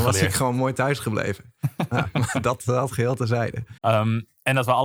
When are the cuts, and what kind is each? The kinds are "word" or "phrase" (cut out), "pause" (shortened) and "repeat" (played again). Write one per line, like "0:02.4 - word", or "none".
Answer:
0:03.8 - pause